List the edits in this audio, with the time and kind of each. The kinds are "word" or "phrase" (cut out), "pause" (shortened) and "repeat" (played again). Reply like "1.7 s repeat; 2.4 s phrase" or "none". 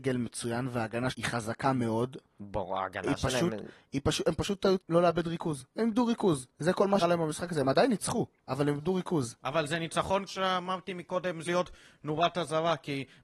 1.1 s word; 2.3 s pause; 4.8 s word; 5.7 s pause; 6.5 s pause; 7.0 s word; 10.3 s word; 11.5 s word